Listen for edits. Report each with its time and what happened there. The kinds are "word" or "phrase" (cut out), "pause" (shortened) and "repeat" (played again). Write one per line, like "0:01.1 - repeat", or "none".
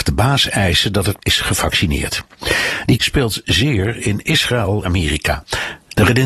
0:01.2 - word
0:03.0 - word
0:04.9 - word